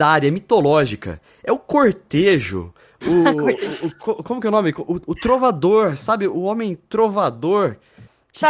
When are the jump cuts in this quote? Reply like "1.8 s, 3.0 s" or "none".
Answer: none

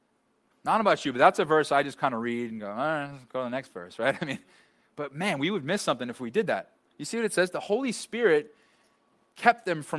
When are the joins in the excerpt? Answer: none

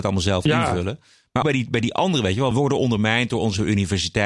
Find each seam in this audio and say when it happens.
1.4 s, 2.5 s

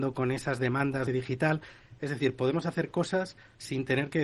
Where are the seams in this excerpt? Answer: 1.1 s

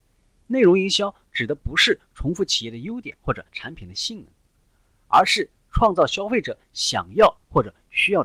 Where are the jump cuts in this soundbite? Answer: 3.5 s

